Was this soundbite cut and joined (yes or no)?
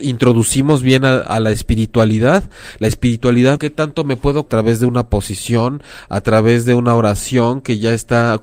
yes